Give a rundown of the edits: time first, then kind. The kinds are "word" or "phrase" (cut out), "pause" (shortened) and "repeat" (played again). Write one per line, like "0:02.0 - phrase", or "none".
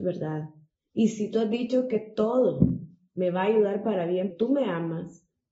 0:04.3 - word